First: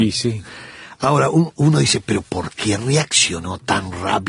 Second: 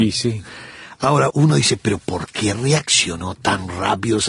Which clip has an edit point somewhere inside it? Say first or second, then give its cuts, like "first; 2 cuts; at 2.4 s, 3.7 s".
second; 1 cut; at 1.3 s